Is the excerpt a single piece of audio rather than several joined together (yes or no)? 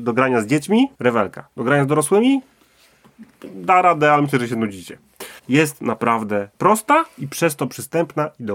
no